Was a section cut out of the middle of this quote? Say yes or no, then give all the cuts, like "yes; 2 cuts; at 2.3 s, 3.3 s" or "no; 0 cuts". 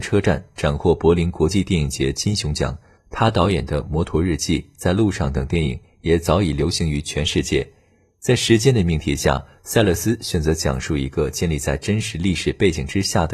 no; 0 cuts